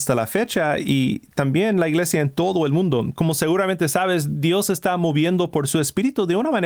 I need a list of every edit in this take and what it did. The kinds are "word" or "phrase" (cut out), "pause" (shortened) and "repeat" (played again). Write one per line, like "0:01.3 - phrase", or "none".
none